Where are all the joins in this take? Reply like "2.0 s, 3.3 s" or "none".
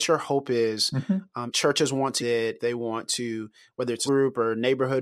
1.5 s, 2.2 s, 2.6 s, 4.1 s